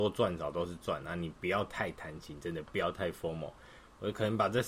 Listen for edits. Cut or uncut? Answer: uncut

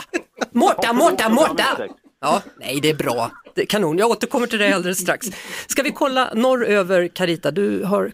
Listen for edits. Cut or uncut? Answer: uncut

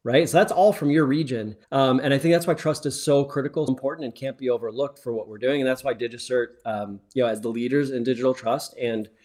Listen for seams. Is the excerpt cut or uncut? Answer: cut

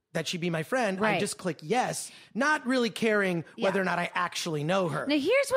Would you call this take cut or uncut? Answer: uncut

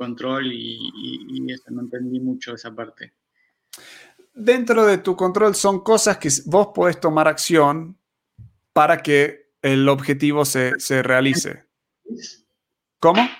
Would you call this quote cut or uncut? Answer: uncut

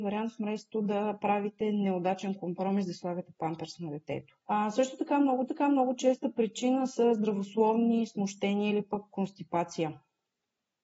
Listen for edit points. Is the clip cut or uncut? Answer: cut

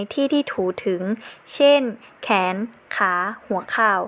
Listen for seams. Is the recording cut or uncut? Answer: uncut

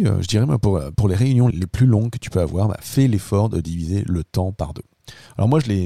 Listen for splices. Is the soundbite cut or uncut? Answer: cut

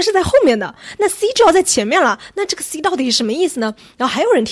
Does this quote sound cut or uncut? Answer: uncut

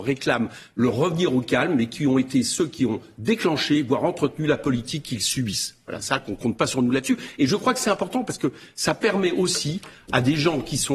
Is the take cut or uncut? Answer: uncut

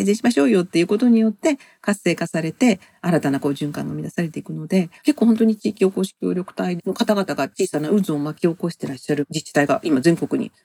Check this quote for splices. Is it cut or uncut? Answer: cut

